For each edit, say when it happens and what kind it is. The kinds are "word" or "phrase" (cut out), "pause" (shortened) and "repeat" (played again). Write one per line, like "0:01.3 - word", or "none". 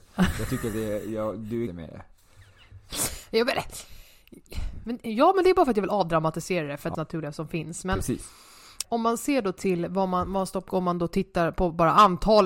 0:01.7 - phrase
0:06.9 - phrase
0:08.8 - word
0:10.7 - phrase

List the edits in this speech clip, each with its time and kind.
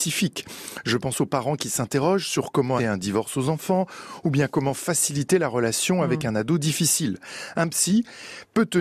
0:02.8 - word

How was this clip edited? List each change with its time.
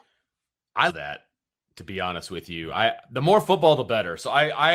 0:00.9 - word

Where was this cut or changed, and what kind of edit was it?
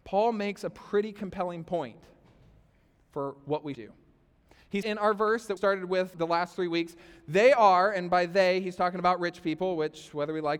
0:03.7 - word
0:04.8 - word
0:05.6 - word
0:06.1 - word

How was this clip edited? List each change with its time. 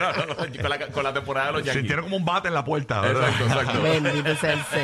none

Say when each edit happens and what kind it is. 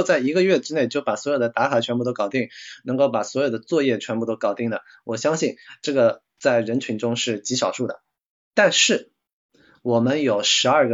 none

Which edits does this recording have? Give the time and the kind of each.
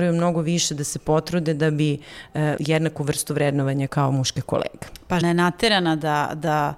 0:02.6 - word
0:03.9 - word
0:05.2 - word

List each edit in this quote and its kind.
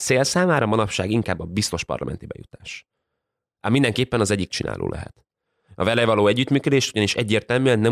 0:04.5 - word

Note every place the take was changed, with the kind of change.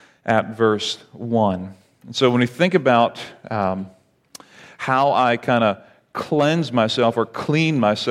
none

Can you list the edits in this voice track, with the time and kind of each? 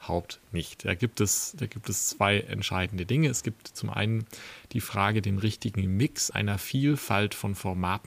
0:06.3 - word

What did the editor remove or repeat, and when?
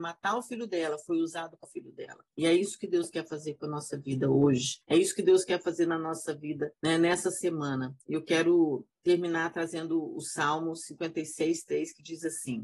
0:01.6 - phrase
0:02.3 - pause
0:04.8 - pause
0:06.8 - pause
0:08.0 - pause
0:08.9 - pause

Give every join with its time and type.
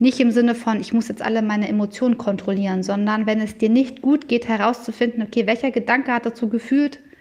none

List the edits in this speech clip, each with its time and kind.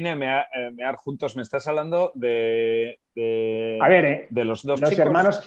none

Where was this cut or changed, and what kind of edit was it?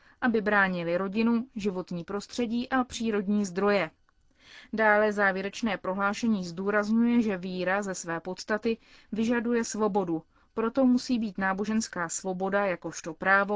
none

